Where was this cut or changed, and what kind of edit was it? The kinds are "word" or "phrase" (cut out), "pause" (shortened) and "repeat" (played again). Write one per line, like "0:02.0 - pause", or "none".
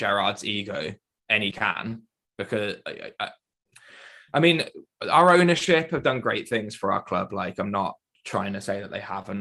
0:01.5 - phrase